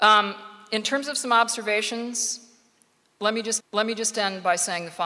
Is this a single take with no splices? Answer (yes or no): no